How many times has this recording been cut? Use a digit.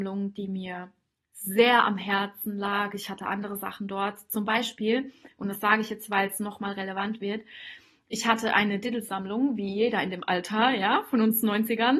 0